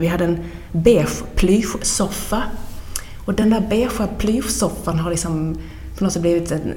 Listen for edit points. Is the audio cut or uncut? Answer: uncut